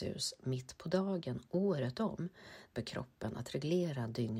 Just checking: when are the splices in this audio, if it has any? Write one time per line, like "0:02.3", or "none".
0:02.7